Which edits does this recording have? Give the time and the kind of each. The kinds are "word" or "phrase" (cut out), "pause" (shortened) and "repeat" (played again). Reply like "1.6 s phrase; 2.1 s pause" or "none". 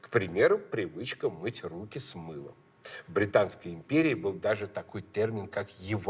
none